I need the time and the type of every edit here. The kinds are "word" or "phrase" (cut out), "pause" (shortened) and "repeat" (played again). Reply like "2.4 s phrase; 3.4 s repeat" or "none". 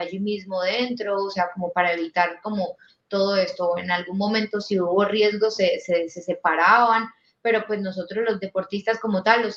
none